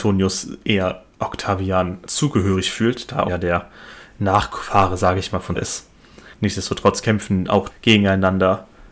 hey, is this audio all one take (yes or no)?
no